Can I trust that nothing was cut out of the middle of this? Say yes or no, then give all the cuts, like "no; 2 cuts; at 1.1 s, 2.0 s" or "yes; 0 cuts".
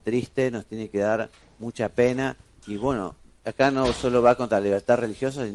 yes; 0 cuts